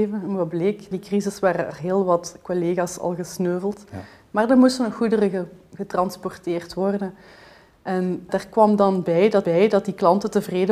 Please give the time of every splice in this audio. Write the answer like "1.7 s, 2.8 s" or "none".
0.9 s, 8.3 s, 9.4 s